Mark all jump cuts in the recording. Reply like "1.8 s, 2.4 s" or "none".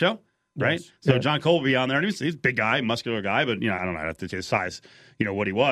3.8 s, 4.3 s